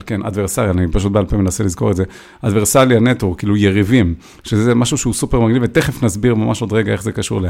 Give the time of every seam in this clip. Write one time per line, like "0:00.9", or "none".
none